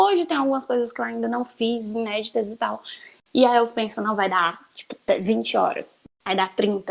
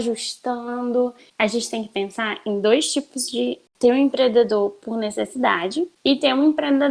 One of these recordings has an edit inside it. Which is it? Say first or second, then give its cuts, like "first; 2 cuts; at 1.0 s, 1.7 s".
second; 1 cut; at 3.7 s